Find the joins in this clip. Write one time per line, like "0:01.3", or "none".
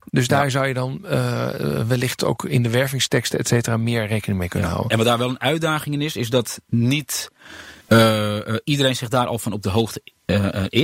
0:07.8